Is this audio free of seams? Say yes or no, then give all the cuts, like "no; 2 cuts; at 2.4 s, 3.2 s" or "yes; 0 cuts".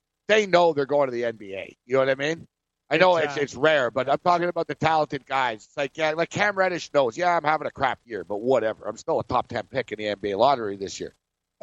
yes; 0 cuts